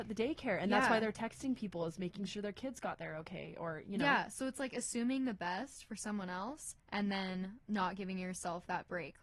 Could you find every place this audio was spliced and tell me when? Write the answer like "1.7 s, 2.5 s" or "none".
6.8 s, 7.6 s